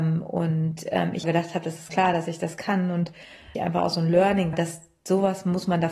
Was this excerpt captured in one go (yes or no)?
no